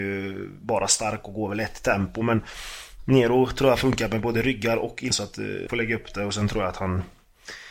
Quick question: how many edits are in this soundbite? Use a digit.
2